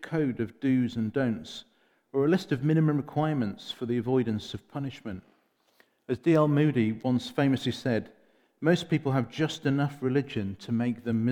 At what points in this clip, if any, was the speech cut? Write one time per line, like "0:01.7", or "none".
none